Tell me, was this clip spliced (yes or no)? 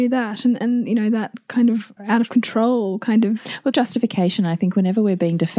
yes